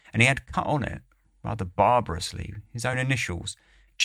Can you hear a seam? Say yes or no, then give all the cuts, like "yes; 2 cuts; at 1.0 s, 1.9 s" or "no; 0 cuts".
no; 0 cuts